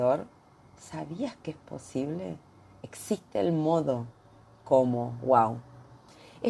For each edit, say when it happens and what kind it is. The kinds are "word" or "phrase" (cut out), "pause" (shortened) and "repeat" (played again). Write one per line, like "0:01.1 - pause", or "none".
none

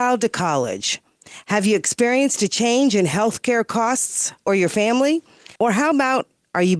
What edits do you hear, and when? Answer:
0:04.5 - phrase
0:05.6 - pause

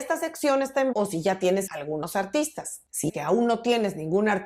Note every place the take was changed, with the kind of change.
0:00.9 - word
0:01.7 - word
0:03.1 - word

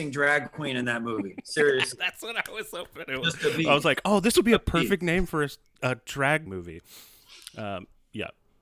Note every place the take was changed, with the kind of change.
0:06.5 - phrase

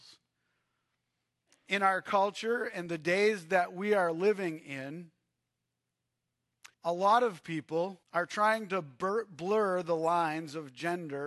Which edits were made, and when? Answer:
0:06.7 - pause
0:08.0 - pause

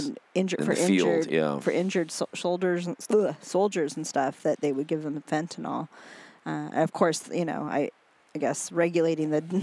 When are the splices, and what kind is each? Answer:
none

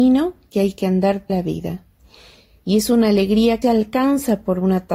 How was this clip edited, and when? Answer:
0:01.3 - word
0:03.6 - phrase

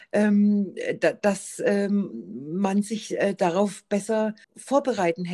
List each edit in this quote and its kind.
0:04.4 - pause

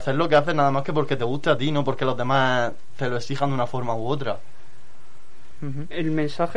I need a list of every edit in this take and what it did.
none

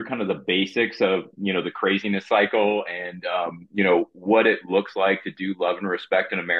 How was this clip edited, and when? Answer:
none

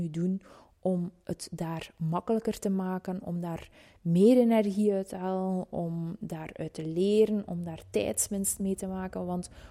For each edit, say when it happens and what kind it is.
none

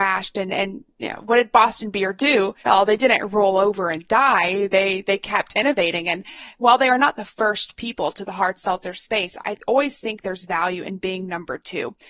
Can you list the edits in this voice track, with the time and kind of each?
0:02.6 - pause

